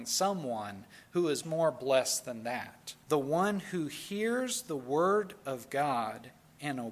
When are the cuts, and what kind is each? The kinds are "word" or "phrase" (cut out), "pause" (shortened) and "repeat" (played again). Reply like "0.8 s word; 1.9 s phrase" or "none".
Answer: 1.4 s word; 3.0 s pause